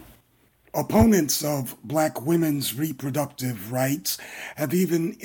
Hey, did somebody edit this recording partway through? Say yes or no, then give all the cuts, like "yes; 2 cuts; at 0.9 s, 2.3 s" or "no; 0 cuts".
no; 0 cuts